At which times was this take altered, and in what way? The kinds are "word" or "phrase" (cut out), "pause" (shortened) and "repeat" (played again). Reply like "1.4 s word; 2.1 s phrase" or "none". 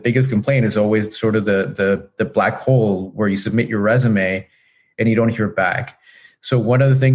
none